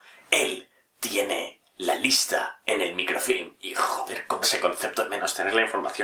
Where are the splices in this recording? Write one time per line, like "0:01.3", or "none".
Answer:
0:04.4